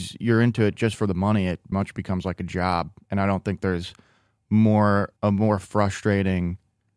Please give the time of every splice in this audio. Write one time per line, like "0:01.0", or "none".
0:01.7
0:05.2